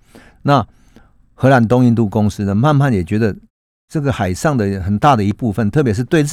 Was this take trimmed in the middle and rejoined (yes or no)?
no